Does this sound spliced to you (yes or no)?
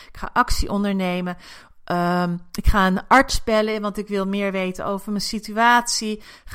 no